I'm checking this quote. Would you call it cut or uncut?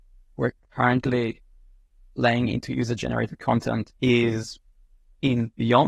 cut